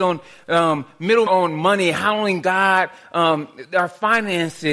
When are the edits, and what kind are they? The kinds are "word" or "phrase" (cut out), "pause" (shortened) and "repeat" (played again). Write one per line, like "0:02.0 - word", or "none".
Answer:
0:01.3 - word